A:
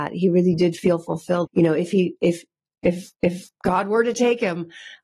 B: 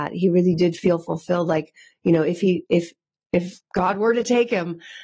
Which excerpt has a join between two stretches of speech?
A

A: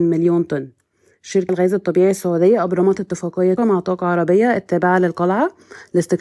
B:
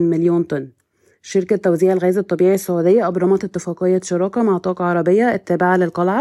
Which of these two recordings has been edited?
A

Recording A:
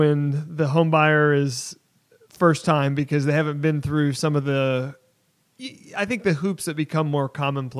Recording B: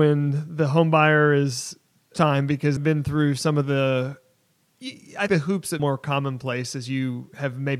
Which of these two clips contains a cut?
B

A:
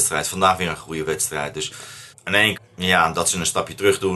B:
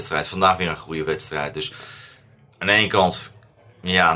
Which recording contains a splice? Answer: A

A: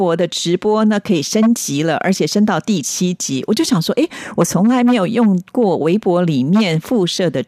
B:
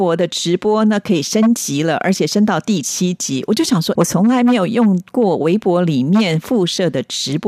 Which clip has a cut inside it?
B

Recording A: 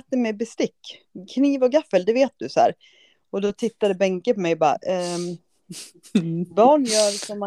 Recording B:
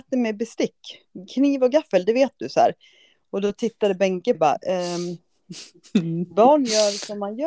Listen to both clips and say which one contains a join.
B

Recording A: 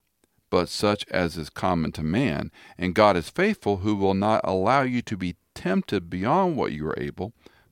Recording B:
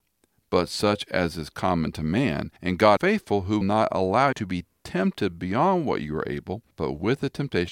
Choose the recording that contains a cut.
B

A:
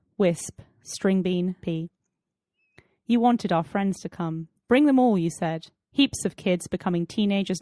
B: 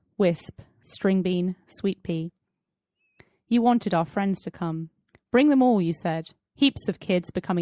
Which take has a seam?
A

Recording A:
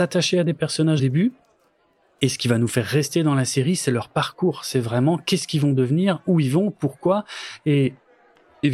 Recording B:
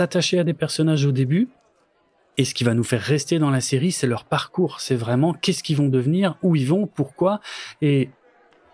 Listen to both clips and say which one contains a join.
A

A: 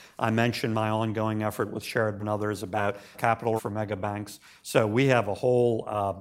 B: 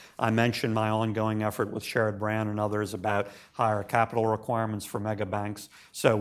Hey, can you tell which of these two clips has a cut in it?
A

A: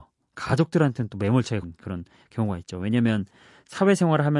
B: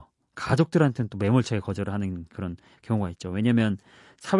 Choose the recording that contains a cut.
A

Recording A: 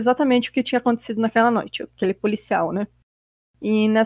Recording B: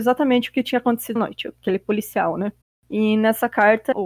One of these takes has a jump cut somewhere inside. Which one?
B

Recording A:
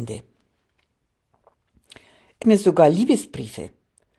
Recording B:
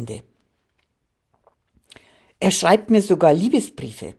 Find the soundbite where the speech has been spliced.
A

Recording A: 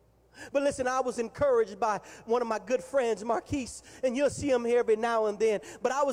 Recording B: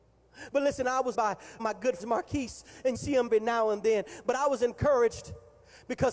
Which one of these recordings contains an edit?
B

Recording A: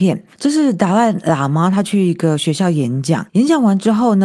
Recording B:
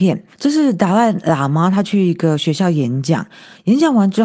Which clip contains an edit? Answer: A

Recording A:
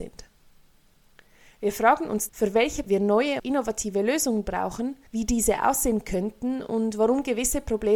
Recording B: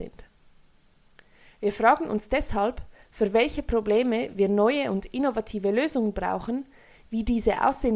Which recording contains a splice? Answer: A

